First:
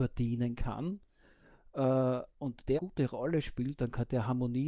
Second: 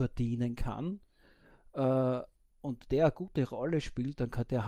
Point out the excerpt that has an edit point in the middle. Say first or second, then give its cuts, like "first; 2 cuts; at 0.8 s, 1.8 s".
first; 2 cuts; at 2.3 s, 2.8 s